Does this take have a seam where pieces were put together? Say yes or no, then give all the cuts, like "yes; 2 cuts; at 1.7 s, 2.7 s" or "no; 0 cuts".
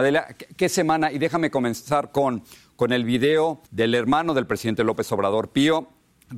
yes; 1 cut; at 3.7 s